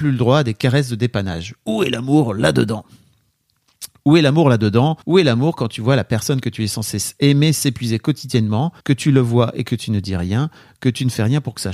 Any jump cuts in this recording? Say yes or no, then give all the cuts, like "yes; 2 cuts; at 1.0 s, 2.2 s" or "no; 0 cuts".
yes; 2 cuts; at 5.0 s, 8.8 s